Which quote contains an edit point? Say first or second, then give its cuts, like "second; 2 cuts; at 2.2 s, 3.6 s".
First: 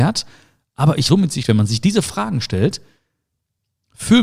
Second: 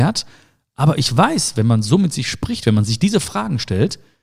first; 2 cuts; at 1.1 s, 1.4 s